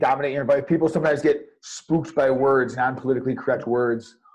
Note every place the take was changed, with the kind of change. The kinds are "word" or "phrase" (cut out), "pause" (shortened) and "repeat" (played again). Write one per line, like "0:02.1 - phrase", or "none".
none